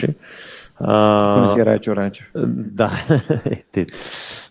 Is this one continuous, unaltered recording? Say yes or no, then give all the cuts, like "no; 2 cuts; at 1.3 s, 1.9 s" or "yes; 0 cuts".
yes; 0 cuts